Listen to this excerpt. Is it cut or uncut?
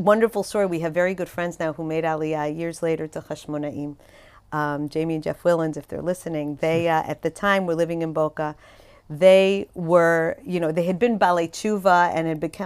uncut